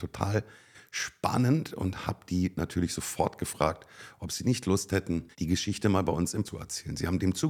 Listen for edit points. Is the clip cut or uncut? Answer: cut